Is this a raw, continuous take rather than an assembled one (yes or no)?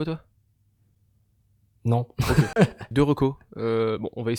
no